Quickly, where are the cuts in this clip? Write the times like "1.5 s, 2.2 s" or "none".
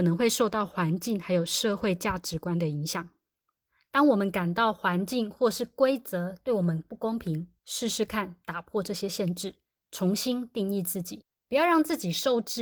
7.6 s